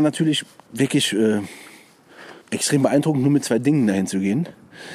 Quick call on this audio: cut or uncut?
cut